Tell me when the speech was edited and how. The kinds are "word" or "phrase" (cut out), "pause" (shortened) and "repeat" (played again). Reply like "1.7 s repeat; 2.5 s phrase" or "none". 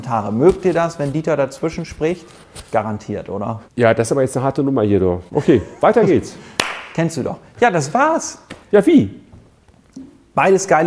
2.7 s pause; 3.7 s pause; 5.3 s pause; 8.6 s pause